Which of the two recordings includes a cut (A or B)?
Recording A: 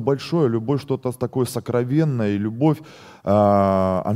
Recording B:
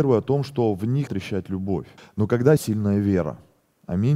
B